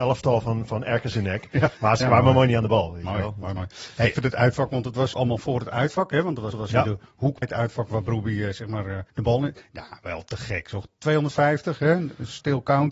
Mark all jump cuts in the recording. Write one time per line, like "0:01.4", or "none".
0:01.1
0:01.8
0:03.6
0:04.1
0:05.1
0:06.5
0:07.4
0:09.1

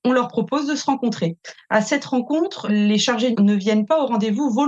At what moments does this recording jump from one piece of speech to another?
0:02.7
0:03.3

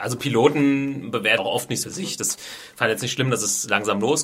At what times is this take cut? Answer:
0:01.4
0:01.8

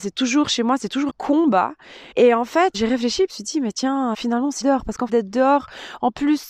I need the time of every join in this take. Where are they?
0:01.1
0:02.1
0:02.7
0:03.3
0:04.1
0:04.6
0:05.1

